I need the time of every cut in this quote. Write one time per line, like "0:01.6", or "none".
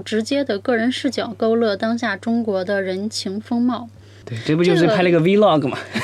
none